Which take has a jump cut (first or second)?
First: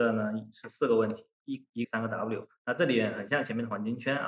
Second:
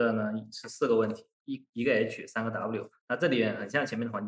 first